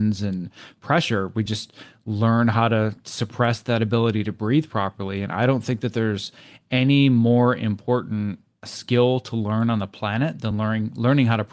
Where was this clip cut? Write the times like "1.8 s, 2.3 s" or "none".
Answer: none